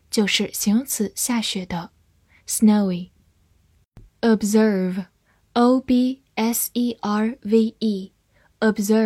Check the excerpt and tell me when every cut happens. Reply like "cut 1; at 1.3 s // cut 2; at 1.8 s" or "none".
cut 1; at 4.1 s